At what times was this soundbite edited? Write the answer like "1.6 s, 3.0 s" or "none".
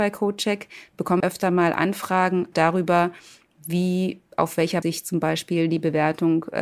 1.2 s, 2.5 s, 4.8 s